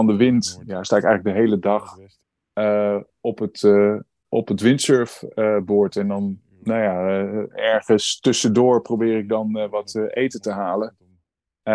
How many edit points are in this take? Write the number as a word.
one